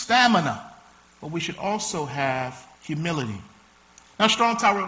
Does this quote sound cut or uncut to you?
cut